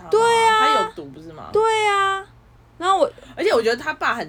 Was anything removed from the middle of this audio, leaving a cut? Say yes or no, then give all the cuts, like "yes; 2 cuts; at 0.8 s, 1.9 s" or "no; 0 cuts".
yes; 1 cut; at 2.6 s